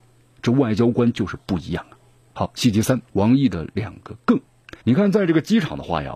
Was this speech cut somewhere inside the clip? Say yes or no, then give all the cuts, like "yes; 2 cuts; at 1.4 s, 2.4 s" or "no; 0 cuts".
yes; 3 cuts; at 2.2 s, 3.0 s, 4.8 s